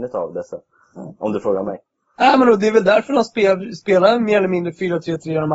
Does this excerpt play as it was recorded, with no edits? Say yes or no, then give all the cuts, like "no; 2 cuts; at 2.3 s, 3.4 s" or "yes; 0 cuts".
yes; 0 cuts